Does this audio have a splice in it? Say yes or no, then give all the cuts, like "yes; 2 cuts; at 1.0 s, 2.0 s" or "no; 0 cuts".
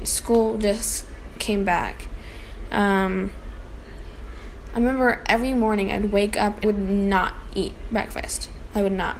yes; 1 cut; at 6.6 s